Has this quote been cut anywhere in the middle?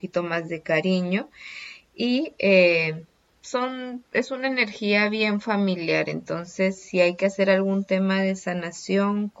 no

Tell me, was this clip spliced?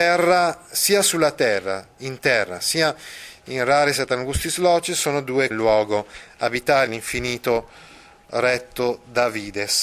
yes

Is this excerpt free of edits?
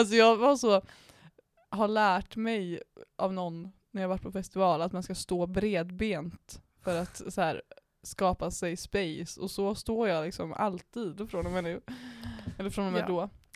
yes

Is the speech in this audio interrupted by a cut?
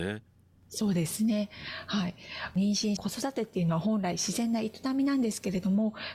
yes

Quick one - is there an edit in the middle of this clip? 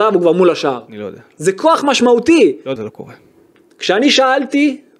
yes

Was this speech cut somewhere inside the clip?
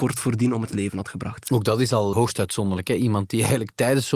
yes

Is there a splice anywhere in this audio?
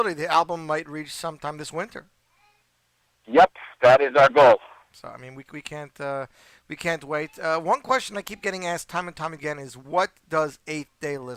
no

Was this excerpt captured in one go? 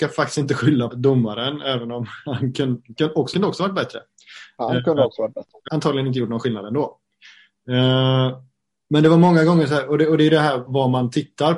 no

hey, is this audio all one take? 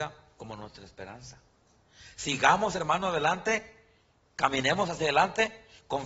yes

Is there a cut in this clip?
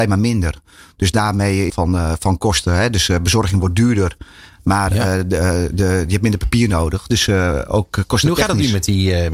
yes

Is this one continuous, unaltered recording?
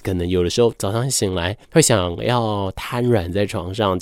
no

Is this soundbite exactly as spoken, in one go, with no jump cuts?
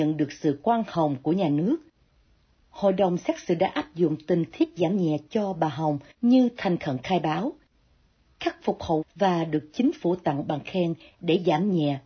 no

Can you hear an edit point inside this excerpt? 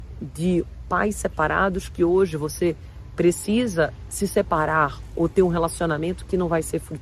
no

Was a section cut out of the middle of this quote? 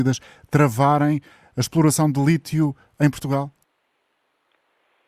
no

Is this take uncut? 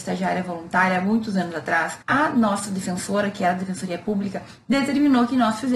no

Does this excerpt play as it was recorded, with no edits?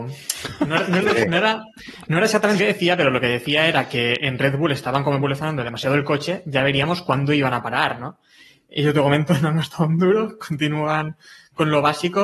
no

